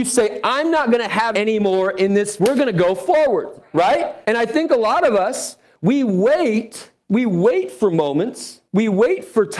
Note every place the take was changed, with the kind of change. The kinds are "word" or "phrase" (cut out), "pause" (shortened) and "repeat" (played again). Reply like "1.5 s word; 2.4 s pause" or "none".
1.3 s word; 2.4 s word; 4.2 s pause; 7.0 s pause; 8.7 s pause